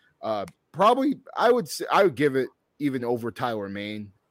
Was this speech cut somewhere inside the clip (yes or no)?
no